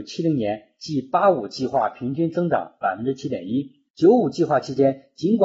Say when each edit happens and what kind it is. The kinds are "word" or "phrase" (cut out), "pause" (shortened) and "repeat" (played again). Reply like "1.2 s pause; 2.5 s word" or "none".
3.9 s pause